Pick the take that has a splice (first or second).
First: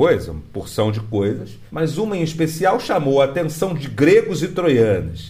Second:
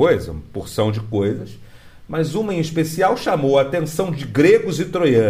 first